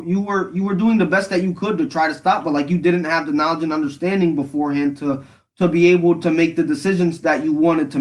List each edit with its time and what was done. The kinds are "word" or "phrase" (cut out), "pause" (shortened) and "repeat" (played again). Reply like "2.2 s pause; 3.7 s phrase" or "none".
none